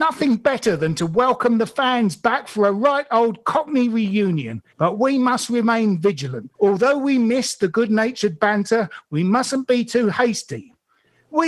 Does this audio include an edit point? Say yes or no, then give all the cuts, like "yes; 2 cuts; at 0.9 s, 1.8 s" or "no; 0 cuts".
yes; 2 cuts; at 4.7 s, 6.5 s